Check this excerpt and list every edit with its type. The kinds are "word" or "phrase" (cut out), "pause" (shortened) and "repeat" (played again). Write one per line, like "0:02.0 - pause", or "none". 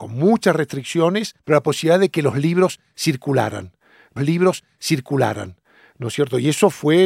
0:01.4 - pause
0:04.2 - repeat